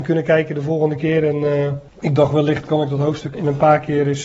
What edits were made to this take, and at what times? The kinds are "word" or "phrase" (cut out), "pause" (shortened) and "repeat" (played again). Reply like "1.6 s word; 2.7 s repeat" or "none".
1.9 s pause; 2.7 s word; 3.3 s word